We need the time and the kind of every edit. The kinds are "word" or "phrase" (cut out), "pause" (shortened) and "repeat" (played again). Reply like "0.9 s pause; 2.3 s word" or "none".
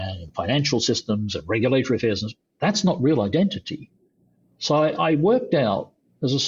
none